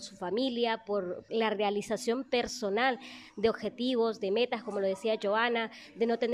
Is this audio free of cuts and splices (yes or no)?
no